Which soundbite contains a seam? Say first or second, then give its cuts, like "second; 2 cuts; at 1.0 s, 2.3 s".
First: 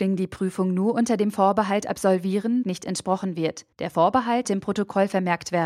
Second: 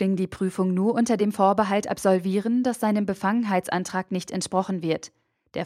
first; 3 cuts; at 2.6 s, 3.7 s, 4.4 s